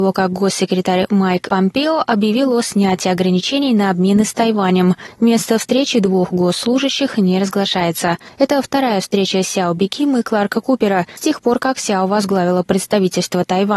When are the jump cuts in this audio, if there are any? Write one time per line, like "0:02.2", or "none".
none